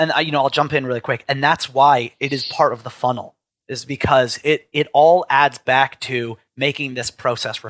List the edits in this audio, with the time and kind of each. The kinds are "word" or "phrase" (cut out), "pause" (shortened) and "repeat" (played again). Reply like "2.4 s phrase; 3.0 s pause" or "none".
3.5 s pause